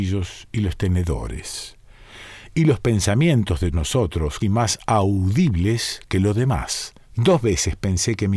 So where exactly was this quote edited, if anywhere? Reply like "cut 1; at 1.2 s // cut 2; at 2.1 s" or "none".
cut 1; at 3.7 s // cut 2; at 4.4 s // cut 3; at 7.0 s